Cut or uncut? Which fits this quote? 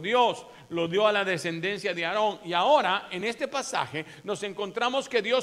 uncut